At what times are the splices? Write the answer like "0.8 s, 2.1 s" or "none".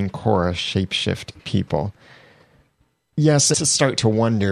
1.4 s, 3.5 s